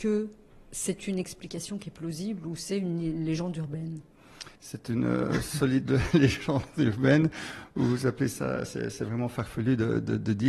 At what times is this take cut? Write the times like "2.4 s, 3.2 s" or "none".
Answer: 4.6 s